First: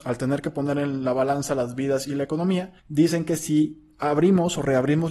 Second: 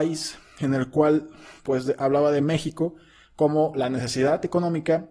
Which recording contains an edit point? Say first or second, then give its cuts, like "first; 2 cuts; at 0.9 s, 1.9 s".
first; 1 cut; at 2.8 s